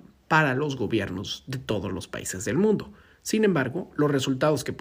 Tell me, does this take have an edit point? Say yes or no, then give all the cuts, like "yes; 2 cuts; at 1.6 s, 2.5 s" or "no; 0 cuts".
no; 0 cuts